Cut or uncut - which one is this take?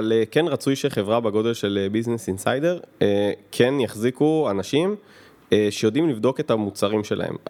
uncut